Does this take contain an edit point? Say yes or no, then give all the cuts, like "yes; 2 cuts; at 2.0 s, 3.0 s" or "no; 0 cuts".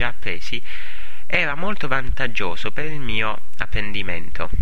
no; 0 cuts